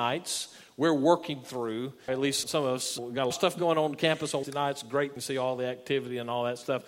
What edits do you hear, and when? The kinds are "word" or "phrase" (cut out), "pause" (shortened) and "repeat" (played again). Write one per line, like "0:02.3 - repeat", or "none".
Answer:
0:02.1 - word
0:02.4 - word
0:03.0 - word
0:03.3 - word
0:04.4 - word
0:05.2 - word